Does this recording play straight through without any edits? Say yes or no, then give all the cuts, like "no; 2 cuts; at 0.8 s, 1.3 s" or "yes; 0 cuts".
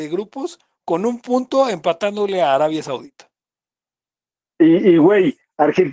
yes; 0 cuts